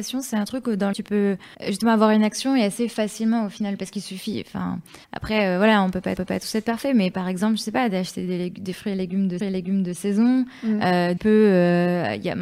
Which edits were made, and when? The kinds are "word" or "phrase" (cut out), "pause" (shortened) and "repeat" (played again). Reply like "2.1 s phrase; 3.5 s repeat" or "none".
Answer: 0.9 s word; 1.5 s pause; 5.0 s pause; 6.2 s repeat; 9.4 s repeat; 11.2 s phrase